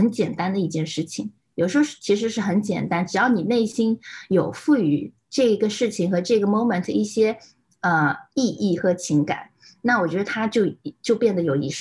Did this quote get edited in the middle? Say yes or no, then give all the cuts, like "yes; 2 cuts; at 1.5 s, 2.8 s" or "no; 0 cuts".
no; 0 cuts